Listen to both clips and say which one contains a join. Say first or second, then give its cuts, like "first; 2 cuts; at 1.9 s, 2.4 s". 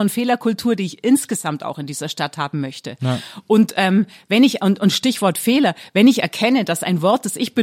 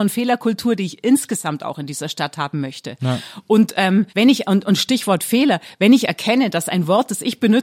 second; 1 cut; at 4.1 s